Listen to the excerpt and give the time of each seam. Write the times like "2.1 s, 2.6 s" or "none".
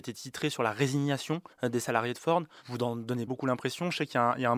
1.5 s, 3.3 s

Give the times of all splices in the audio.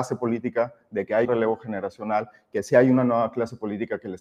1.2 s

